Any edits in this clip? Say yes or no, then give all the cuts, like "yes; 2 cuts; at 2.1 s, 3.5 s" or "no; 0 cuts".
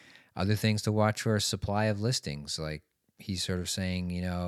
no; 0 cuts